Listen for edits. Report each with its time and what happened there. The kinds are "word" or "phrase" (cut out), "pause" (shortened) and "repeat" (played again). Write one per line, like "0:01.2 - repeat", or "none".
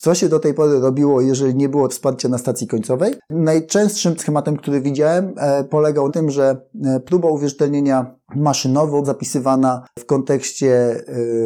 0:01.9 - word
0:04.2 - word
0:06.1 - word
0:09.0 - word